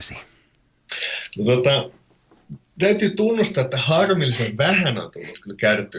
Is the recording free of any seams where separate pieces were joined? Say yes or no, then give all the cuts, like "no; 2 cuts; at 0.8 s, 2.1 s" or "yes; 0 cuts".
yes; 0 cuts